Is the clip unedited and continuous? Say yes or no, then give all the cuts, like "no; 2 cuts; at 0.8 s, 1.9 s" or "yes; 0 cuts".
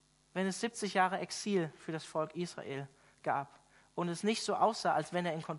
yes; 0 cuts